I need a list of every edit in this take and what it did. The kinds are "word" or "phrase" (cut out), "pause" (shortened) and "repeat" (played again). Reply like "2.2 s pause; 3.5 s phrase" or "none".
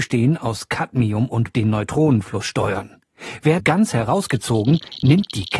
1.5 s phrase; 3.6 s phrase